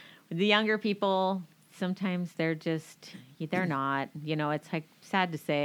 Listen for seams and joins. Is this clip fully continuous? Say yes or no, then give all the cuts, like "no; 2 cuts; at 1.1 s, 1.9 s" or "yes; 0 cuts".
yes; 0 cuts